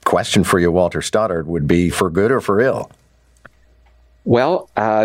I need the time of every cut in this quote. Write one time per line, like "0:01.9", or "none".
0:01.9